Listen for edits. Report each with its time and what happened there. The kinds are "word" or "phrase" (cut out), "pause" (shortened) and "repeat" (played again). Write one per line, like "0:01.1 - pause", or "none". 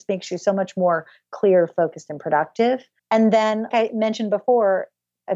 0:03.0 - pause
0:03.7 - word

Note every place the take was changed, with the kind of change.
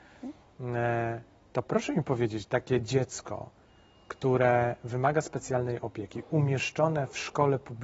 none

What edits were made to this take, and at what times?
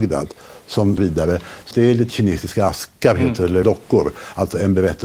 0:01.0 - phrase
0:01.7 - word
0:02.1 - word
0:03.0 - pause
0:03.6 - word

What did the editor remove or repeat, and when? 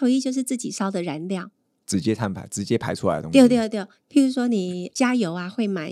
none

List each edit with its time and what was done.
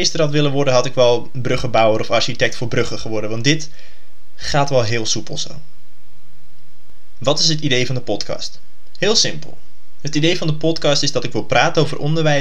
none

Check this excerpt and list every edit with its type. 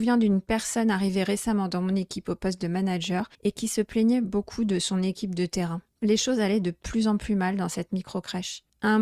0:03.3 - pause

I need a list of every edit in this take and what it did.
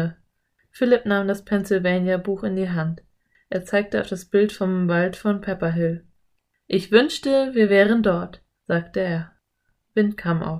none

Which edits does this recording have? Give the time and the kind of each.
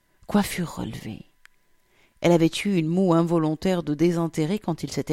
none

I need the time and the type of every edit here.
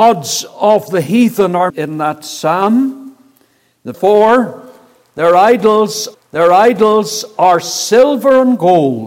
0:01.7 - word
0:03.9 - word
0:06.1 - repeat

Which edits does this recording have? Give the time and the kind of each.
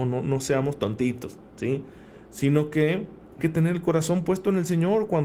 0:03.4 - word

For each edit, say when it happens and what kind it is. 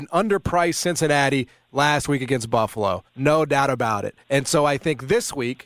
0:03.1 - pause
0:04.2 - pause

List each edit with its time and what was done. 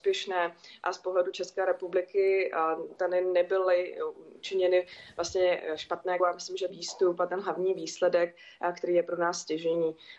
0:06.2 - phrase
0:06.7 - phrase

